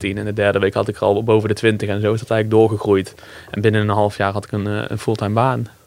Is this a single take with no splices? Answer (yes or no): yes